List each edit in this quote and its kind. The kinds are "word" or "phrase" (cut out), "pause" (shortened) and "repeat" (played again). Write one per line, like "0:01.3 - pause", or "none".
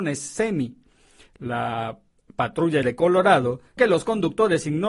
0:02.8 - word
0:03.8 - word

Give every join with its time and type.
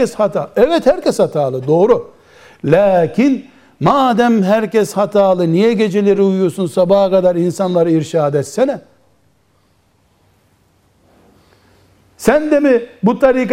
none

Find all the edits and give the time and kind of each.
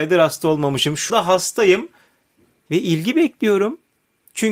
0:01.1 - word

